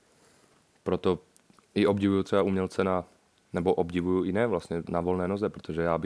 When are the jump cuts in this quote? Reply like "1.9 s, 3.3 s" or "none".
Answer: 4.9 s